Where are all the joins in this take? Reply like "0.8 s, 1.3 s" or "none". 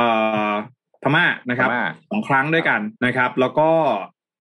3.0 s